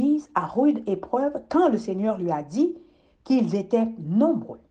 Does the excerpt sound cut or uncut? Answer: uncut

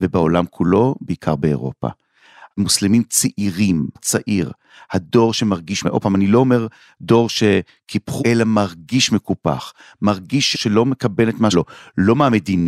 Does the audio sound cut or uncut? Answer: cut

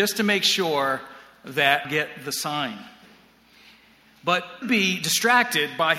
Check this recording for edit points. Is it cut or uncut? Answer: cut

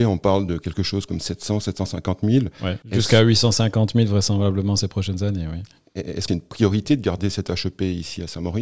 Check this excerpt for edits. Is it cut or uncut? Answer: cut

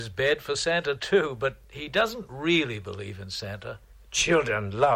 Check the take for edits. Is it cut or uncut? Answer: cut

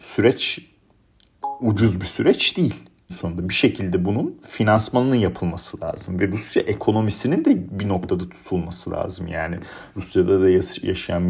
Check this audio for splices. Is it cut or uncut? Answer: cut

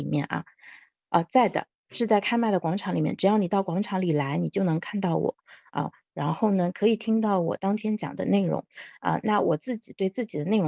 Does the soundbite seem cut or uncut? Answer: uncut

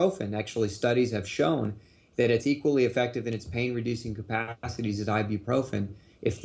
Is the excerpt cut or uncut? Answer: uncut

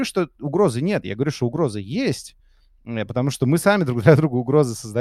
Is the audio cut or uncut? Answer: uncut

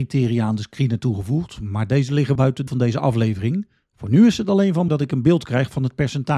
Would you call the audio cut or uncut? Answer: cut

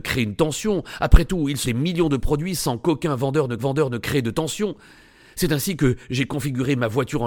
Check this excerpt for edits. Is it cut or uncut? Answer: cut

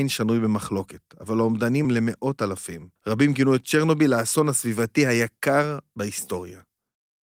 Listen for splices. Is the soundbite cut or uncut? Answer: cut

